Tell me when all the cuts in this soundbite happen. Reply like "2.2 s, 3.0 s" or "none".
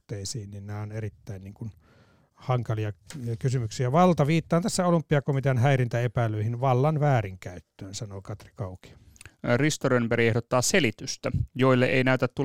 none